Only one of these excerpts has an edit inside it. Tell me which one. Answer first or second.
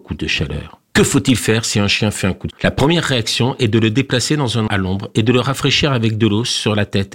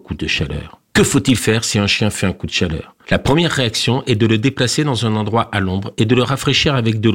first